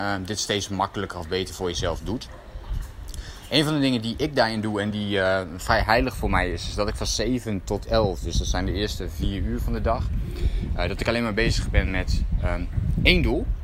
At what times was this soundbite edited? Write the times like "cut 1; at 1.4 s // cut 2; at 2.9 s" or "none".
none